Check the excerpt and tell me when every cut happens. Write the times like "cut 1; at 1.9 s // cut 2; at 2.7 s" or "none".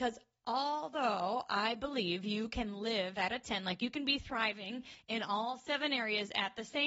none